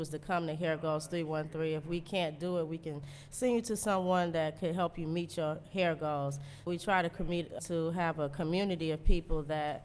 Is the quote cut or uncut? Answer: cut